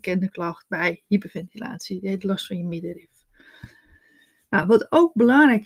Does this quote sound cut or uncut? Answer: uncut